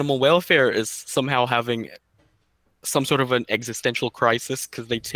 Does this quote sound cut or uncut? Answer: uncut